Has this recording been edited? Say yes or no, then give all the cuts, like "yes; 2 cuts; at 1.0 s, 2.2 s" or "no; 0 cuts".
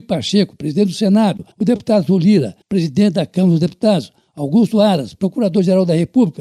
yes; 2 cuts; at 1.5 s, 2.6 s